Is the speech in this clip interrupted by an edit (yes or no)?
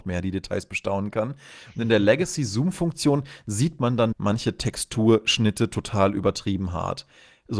yes